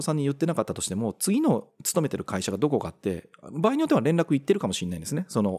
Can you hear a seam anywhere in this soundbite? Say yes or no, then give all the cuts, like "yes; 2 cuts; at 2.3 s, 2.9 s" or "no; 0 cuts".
yes; 1 cut; at 1.7 s